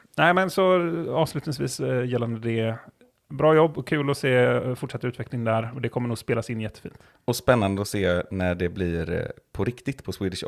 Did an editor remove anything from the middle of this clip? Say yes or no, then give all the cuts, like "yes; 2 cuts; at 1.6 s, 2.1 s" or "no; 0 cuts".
no; 0 cuts